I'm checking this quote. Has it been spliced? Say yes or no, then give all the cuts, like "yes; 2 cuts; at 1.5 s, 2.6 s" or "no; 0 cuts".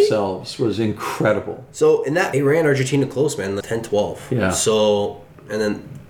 yes; 2 cuts; at 2.3 s, 3.6 s